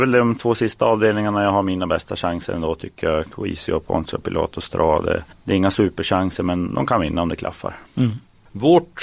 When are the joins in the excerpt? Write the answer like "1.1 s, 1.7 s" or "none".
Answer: 5.3 s